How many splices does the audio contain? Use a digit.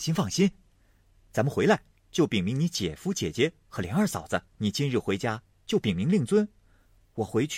1